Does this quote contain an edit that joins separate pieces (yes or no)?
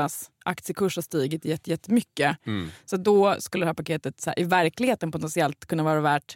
yes